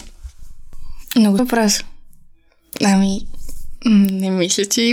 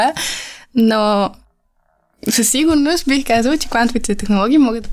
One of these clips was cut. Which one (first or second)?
first